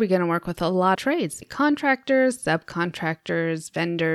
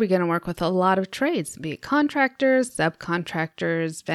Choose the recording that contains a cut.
first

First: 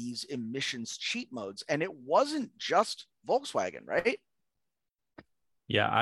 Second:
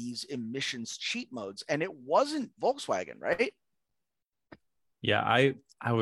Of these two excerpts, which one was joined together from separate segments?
second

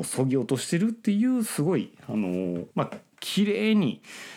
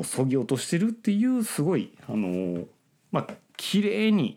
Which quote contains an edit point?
first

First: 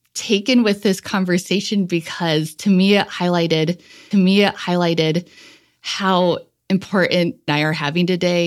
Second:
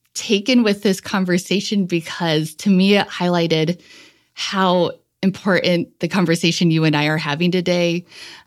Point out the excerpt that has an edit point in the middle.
first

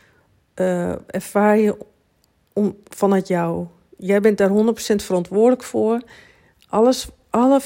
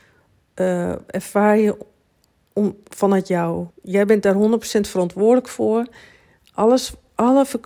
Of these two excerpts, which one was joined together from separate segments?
second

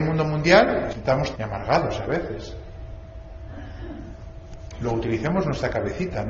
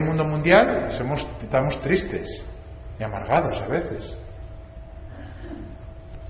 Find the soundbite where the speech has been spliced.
first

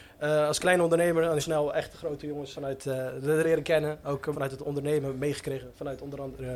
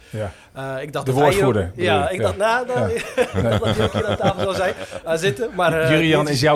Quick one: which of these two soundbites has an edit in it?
first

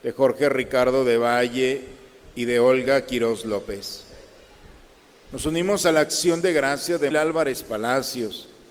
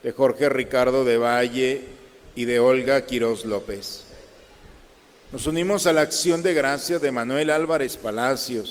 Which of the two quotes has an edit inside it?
first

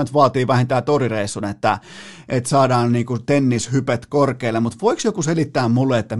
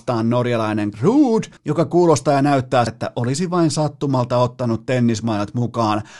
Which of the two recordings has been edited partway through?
second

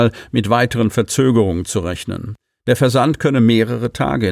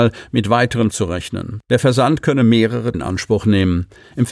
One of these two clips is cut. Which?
second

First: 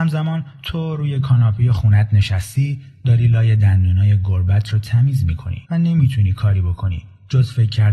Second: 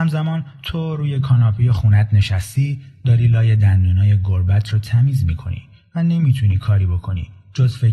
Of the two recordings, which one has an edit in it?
first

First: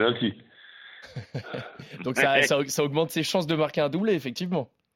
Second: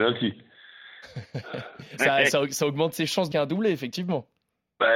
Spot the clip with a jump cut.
second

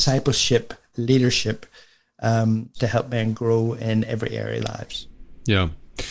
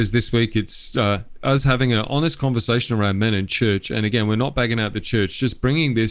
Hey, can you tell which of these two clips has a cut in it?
first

